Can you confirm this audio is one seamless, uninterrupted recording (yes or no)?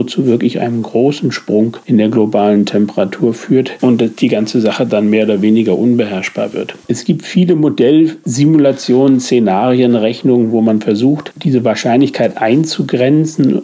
yes